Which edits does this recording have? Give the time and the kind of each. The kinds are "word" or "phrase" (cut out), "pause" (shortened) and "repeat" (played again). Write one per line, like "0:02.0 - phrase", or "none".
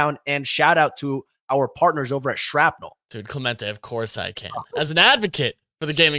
none